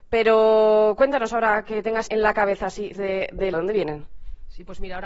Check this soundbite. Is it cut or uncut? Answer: cut